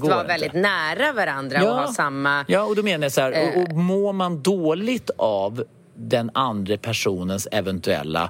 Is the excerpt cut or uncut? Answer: uncut